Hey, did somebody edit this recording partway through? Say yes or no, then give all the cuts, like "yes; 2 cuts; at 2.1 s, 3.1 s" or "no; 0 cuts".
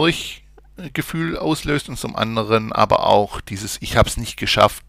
no; 0 cuts